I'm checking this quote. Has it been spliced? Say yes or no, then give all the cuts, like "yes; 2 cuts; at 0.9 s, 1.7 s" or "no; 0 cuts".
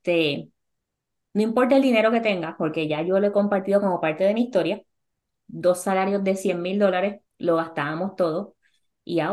yes; 1 cut; at 7.3 s